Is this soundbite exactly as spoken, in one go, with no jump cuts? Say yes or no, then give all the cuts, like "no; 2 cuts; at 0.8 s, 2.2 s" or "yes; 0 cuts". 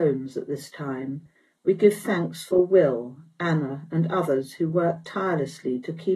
yes; 0 cuts